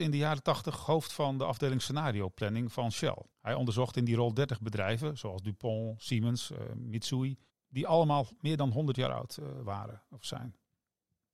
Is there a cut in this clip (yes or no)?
yes